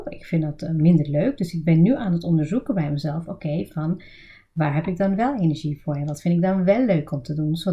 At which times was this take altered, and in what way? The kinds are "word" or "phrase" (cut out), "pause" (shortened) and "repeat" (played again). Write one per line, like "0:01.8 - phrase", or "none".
none